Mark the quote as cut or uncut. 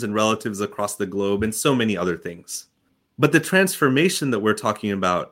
uncut